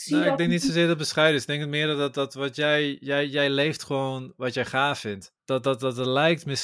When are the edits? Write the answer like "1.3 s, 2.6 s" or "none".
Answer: 5.4 s